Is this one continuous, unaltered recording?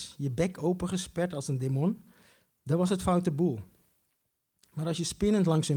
yes; 0 cuts

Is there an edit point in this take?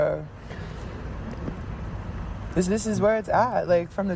yes; 1 cut; at 2.7 s

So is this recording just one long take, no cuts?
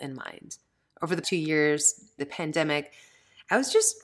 no; 2 cuts; at 1.2 s, 2.2 s

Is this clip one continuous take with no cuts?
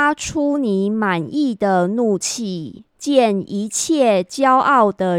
no; 1 cut; at 2.9 s

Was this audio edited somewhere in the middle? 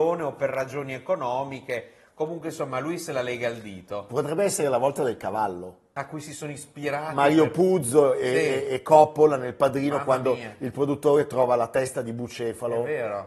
no; 0 cuts

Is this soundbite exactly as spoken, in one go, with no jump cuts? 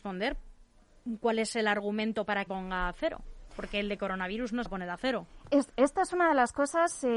no; 2 cuts; at 2.5 s, 4.7 s

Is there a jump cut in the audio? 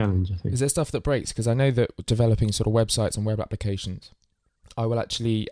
no; 0 cuts

